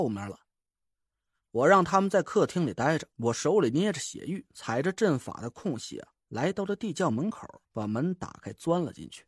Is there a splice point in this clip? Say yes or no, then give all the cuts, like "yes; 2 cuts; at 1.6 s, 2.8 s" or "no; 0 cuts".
yes; 2 cuts; at 3.1 s, 7.7 s